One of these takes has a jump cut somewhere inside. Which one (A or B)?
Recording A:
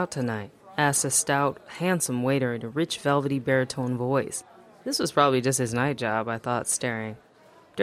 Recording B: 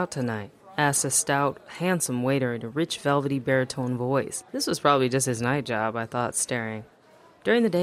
B